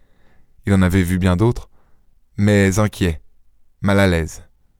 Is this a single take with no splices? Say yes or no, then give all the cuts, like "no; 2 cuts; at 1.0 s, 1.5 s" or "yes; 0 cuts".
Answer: yes; 0 cuts